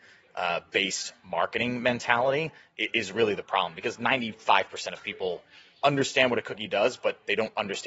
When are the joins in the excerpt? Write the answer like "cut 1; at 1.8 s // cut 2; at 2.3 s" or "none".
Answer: none